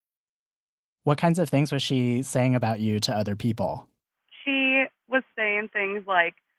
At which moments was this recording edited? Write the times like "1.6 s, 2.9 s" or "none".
none